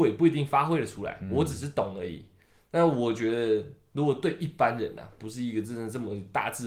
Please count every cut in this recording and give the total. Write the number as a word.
zero